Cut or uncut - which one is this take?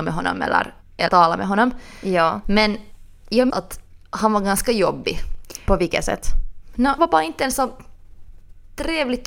cut